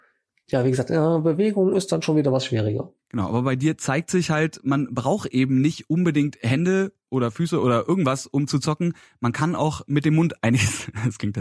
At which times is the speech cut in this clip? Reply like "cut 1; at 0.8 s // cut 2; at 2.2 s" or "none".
none